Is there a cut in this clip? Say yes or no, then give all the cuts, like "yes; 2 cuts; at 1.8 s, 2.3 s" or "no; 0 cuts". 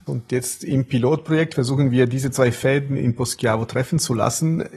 no; 0 cuts